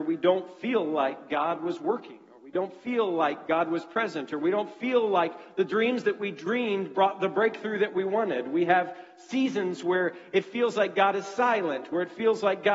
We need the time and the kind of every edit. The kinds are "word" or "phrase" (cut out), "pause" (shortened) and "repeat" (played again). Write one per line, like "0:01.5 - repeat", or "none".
none